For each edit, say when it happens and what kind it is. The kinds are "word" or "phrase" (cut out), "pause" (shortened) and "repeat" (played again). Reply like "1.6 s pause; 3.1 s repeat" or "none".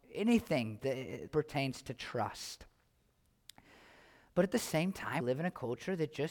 1.3 s word; 5.2 s word